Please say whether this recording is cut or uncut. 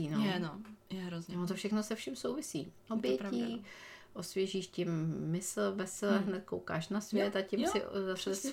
uncut